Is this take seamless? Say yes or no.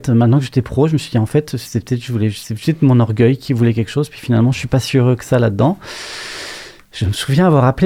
yes